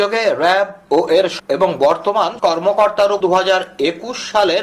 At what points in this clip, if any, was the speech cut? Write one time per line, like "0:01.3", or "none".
0:01.4
0:02.4
0:03.2